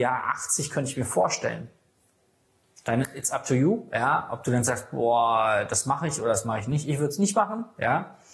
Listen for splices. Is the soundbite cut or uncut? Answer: uncut